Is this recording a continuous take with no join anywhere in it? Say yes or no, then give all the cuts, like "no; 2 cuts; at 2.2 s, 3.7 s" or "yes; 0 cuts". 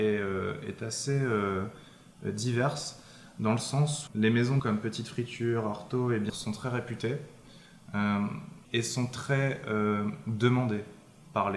no; 4 cuts; at 4.1 s, 4.6 s, 6.3 s, 8.6 s